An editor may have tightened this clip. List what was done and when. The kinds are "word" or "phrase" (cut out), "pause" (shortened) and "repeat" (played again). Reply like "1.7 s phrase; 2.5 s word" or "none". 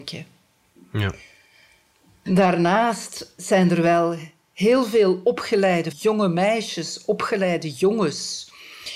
3.4 s word; 5.9 s word

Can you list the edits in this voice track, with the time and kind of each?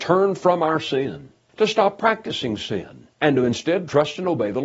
1.5 s pause; 3.1 s pause

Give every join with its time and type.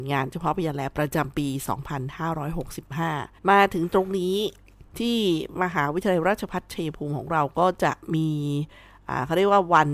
3.4 s pause; 4.9 s pause

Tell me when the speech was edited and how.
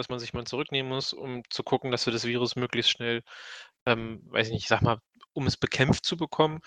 none

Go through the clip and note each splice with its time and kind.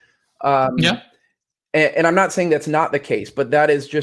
none

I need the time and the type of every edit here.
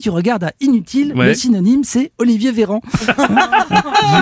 none

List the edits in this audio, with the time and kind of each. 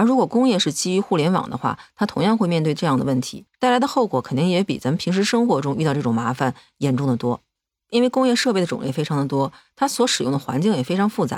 3.5 s pause

